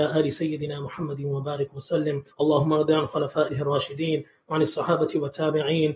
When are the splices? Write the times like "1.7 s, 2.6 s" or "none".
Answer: 2.3 s